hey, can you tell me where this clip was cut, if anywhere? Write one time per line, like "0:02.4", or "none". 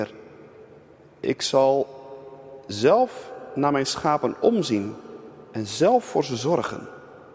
none